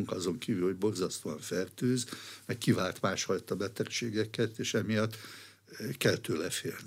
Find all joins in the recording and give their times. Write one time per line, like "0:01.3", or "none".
none